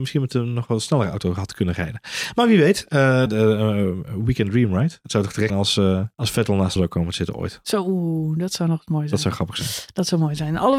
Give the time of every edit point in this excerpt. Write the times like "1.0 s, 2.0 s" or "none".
3.3 s, 5.5 s, 6.1 s, 6.8 s